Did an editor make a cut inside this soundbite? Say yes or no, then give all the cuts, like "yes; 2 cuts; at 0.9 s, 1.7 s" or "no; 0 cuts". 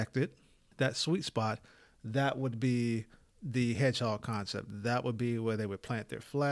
no; 0 cuts